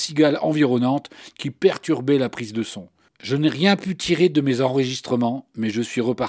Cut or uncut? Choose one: uncut